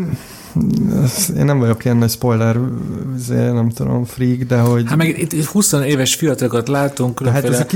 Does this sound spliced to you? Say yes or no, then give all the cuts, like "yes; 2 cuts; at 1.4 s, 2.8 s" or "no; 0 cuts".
no; 0 cuts